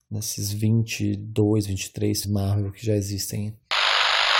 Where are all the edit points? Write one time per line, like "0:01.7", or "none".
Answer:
0:02.2